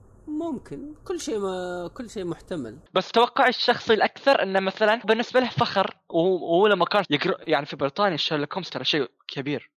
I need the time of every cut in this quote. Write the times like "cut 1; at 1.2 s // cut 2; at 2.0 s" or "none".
cut 1; at 2.9 s // cut 2; at 5.0 s // cut 3; at 7.0 s